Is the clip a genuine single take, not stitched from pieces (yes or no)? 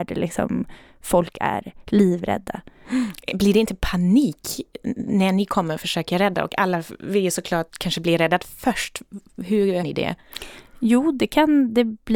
no